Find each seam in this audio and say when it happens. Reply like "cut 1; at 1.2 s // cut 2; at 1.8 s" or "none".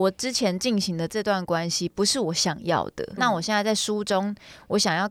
cut 1; at 3.2 s